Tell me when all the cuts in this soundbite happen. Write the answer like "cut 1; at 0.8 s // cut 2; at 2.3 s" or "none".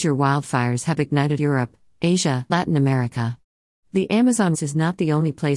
cut 1; at 1.4 s // cut 2; at 2.5 s // cut 3; at 4.5 s